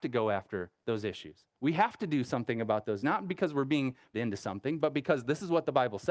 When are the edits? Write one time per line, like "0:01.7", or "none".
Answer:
0:01.5
0:03.0
0:04.1